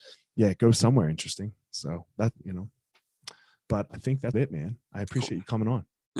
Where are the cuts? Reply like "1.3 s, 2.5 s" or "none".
3.9 s, 4.3 s